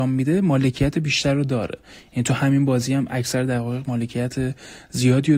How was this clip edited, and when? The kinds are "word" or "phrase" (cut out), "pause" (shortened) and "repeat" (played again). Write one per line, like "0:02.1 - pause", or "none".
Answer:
none